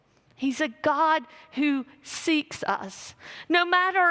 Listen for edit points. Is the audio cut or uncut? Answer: uncut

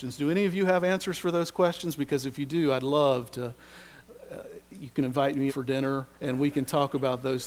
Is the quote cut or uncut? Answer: cut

